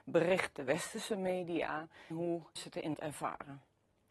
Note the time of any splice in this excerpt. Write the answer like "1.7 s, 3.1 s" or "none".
2.1 s, 2.6 s, 2.9 s